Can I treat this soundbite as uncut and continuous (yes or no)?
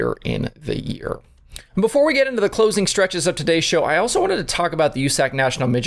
no